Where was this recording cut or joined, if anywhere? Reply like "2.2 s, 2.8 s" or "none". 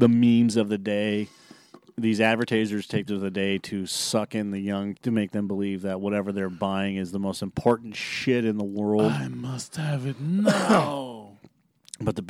3.1 s, 5.0 s